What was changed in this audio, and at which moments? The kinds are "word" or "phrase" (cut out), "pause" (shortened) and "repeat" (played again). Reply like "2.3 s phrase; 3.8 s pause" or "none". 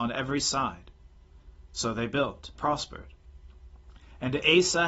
2.6 s word